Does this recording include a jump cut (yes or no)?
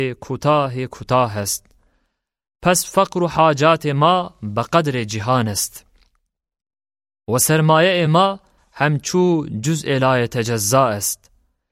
no